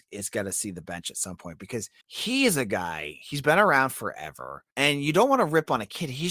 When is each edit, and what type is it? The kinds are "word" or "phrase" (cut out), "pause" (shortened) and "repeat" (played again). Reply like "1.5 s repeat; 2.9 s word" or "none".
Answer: 2.0 s pause; 4.7 s pause